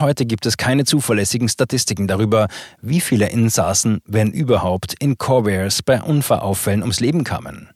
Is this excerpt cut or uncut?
uncut